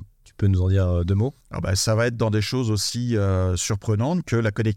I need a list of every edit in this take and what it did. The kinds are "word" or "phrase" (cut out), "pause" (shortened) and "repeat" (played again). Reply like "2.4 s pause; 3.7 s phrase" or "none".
1.4 s pause